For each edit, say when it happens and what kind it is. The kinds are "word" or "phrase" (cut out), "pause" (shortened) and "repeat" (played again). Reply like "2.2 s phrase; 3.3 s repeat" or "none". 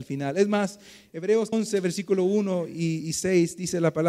1.5 s word